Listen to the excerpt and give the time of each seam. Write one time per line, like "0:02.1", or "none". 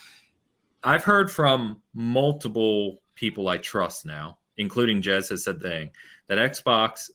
0:04.5
0:05.6